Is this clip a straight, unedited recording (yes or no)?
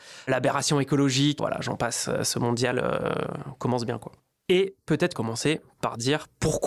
no